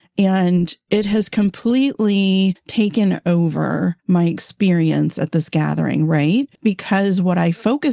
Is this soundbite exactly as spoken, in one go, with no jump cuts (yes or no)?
no